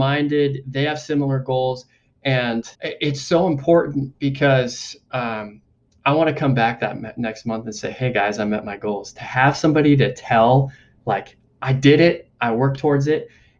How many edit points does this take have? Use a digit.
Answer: 1